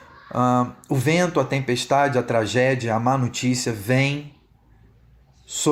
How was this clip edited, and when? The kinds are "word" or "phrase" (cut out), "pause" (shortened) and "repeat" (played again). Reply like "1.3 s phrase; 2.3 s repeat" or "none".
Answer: none

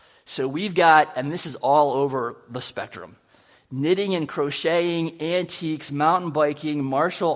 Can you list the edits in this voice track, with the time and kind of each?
none

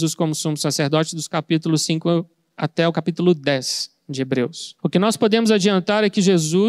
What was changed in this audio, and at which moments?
4.8 s pause

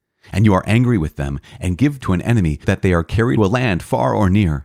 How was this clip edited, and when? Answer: 2.0 s word; 2.6 s word; 3.4 s phrase

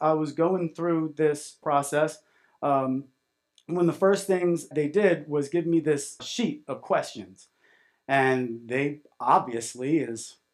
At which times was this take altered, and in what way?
1.6 s word; 4.7 s word; 6.2 s word

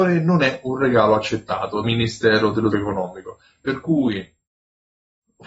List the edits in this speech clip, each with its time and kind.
1.8 s word; 2.7 s word

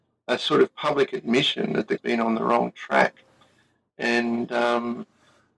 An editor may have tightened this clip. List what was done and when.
2.0 s word

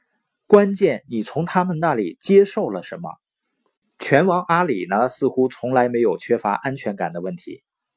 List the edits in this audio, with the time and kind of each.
none

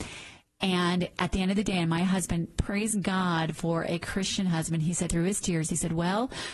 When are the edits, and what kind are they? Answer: 5.1 s word

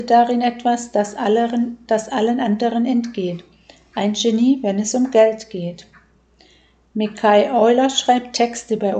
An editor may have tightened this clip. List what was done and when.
none

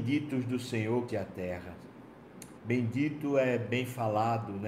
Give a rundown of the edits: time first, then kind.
1.1 s phrase; 2.6 s pause

